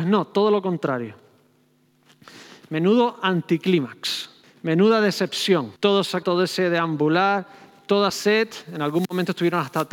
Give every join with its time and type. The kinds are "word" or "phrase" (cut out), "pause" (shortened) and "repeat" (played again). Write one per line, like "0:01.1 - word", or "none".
0:04.4 - pause
0:05.8 - pause
0:06.2 - word
0:08.1 - word

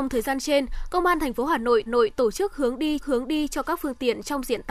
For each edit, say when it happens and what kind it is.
0:01.9 - repeat
0:03.0 - repeat

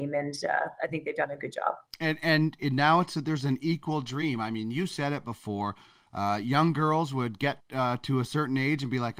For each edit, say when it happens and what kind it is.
0:01.9 - pause
0:07.6 - pause

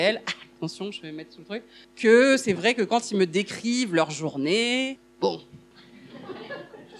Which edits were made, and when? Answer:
0:01.8 - pause

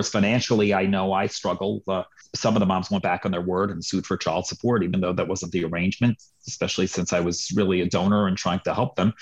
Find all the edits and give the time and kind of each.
none

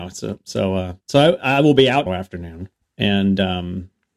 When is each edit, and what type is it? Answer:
0:01.0 - pause
0:02.1 - word
0:02.8 - pause

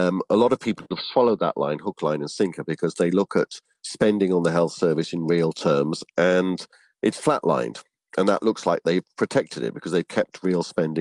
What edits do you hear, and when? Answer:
none

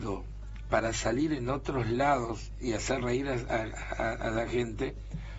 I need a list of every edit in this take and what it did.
none

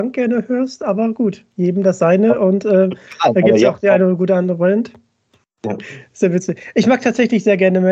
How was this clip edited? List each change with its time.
none

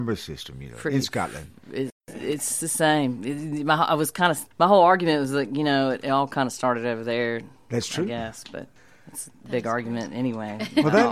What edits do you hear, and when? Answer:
0:04.5 - pause
0:08.8 - pause

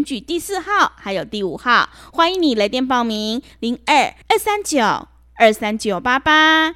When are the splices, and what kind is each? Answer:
0:04.2 - pause

